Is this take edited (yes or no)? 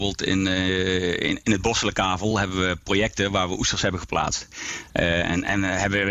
no